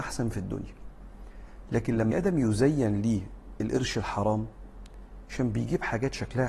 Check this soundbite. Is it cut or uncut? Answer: cut